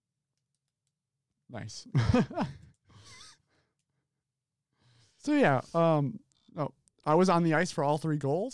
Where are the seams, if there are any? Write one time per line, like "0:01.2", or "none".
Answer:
none